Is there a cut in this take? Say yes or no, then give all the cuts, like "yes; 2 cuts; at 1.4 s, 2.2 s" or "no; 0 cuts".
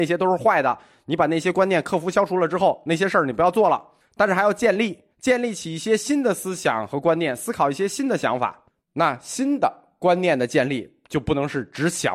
yes; 3 cuts; at 4.0 s, 5.1 s, 8.7 s